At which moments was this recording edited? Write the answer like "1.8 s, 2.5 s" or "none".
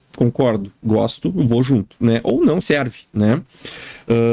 2.6 s